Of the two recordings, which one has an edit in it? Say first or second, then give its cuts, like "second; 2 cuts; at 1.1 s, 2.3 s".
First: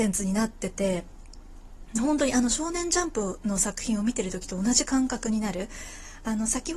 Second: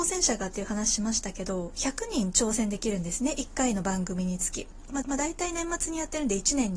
second; 1 cut; at 5.0 s